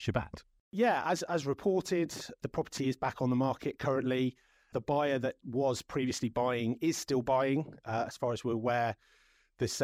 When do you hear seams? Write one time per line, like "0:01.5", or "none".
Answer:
none